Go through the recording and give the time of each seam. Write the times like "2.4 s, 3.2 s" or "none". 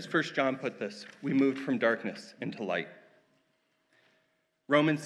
none